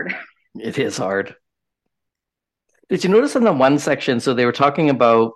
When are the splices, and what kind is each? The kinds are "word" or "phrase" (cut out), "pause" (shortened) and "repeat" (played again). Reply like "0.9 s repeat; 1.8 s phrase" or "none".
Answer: none